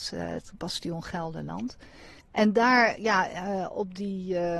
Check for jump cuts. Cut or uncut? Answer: cut